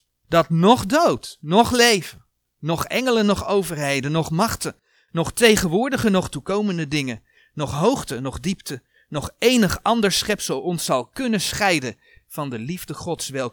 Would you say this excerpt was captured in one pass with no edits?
yes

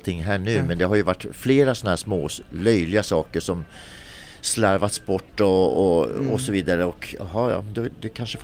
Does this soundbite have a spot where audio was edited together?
yes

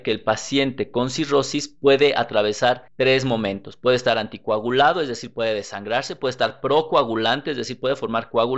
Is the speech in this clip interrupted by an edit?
yes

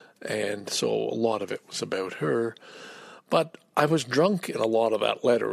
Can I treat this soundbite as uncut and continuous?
yes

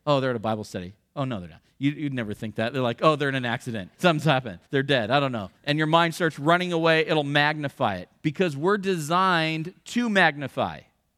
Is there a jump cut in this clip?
yes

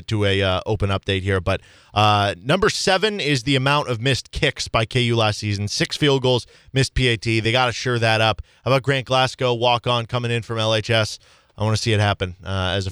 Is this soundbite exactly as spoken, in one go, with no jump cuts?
yes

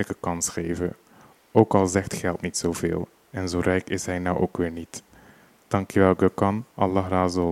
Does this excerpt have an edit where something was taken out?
no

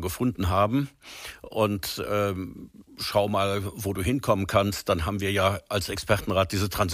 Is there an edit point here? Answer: yes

